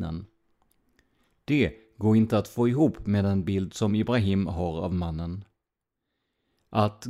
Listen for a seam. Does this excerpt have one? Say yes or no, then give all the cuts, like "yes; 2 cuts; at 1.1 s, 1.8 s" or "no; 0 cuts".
no; 0 cuts